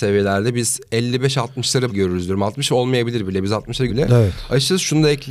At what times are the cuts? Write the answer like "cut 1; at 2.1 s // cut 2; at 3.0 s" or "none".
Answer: cut 1; at 1.9 s // cut 2; at 3.9 s